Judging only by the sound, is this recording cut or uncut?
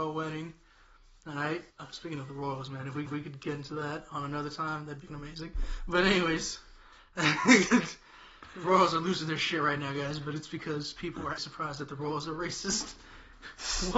cut